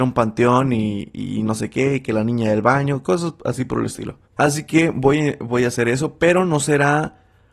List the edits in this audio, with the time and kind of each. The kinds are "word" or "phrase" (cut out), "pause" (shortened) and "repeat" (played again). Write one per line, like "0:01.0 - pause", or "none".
0:04.3 - pause